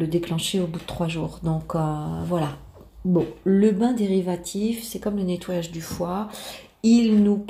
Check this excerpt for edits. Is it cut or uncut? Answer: uncut